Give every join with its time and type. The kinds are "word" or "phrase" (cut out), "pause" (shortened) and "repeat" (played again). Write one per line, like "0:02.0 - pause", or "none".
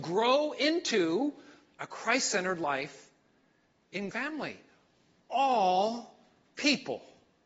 0:04.1 - word